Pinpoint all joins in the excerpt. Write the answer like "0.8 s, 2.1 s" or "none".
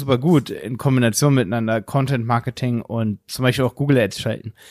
none